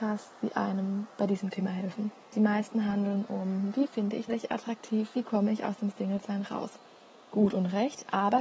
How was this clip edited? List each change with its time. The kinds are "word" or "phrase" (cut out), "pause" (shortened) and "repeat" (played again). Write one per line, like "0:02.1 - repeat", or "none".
0:04.3 - phrase